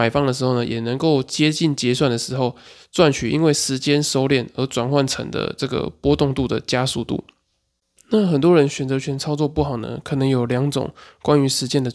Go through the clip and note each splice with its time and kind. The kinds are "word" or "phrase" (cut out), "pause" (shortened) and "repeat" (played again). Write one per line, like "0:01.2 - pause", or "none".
none

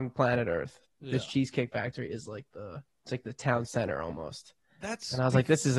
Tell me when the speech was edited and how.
0:02.9 - pause

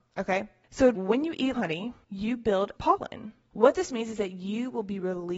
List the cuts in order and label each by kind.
0:00.9 - phrase
0:01.5 - word
0:02.0 - pause
0:02.8 - phrase

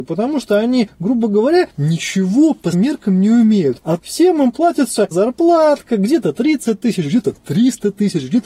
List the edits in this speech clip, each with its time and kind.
0:02.7 - word
0:04.0 - word
0:05.1 - word

